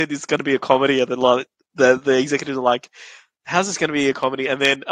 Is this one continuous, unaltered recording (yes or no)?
yes